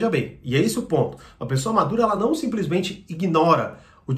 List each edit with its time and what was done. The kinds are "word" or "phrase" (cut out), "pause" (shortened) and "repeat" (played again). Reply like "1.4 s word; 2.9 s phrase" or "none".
none